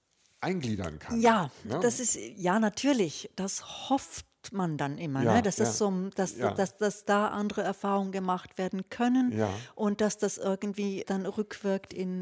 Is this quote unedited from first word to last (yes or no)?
no